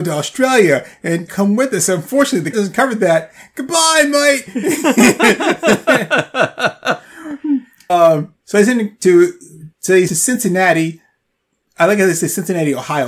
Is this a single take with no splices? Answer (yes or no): no